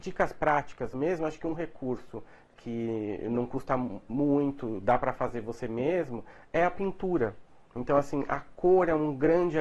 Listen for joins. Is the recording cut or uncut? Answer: uncut